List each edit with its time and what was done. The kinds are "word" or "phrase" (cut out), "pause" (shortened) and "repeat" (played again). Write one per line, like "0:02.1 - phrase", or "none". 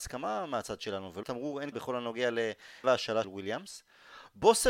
0:01.2 - word
0:01.7 - word
0:02.8 - word
0:03.2 - word